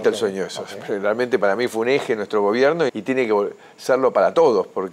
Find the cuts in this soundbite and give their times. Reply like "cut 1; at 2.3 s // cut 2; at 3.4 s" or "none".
cut 1; at 2.9 s